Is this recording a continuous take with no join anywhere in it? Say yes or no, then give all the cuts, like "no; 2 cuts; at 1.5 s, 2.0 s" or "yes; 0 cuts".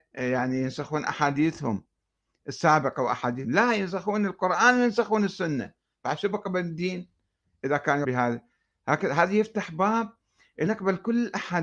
no; 3 cuts; at 3.4 s, 8.0 s, 10.7 s